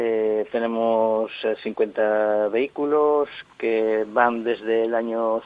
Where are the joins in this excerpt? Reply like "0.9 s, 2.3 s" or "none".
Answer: none